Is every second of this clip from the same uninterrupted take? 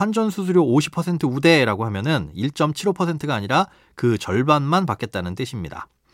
yes; 0 cuts

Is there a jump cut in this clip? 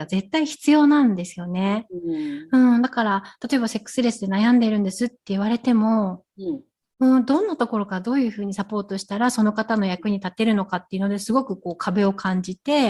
no; 0 cuts

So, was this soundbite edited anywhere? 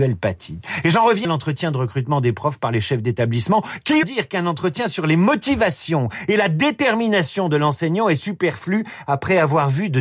yes; 2 cuts; at 1.2 s, 4.0 s

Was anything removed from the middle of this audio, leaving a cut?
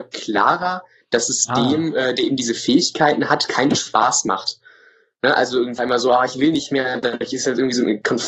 yes; 1 cut; at 5.8 s

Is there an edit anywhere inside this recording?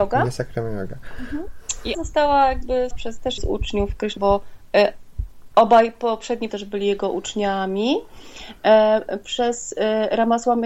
yes; 5 cuts; at 1.9 s, 2.9 s, 3.4 s, 4.2 s, 6.5 s

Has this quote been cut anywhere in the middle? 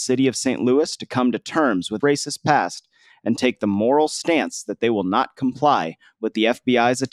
yes; 1 cut; at 2.0 s

